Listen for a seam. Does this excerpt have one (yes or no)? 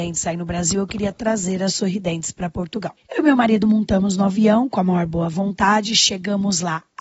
no